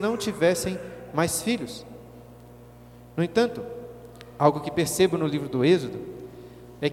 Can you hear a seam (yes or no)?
no